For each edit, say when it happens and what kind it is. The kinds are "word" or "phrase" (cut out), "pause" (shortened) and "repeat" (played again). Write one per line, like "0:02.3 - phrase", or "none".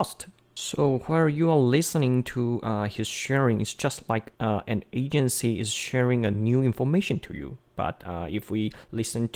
0:04.4 - pause